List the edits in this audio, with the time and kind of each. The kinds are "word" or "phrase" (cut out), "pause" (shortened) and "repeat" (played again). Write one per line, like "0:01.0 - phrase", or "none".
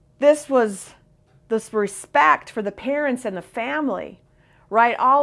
none